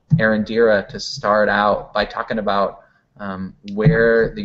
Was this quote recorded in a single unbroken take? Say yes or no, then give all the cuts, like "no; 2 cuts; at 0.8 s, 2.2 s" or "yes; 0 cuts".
yes; 0 cuts